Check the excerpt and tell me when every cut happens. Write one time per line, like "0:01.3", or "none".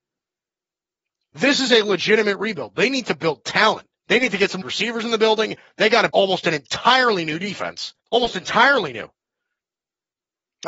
0:04.0
0:04.6
0:06.1
0:08.0